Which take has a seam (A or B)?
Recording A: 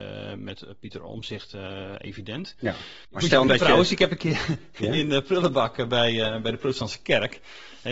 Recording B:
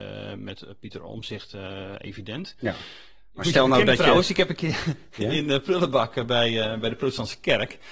A